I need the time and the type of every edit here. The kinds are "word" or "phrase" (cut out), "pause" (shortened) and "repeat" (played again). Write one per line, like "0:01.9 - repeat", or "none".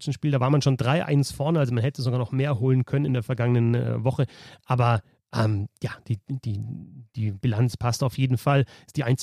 none